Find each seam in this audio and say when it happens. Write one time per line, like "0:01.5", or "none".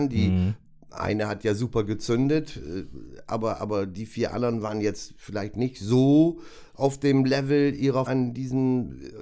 0:08.1